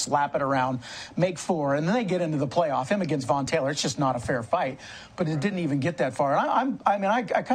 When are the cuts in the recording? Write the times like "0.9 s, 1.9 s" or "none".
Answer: none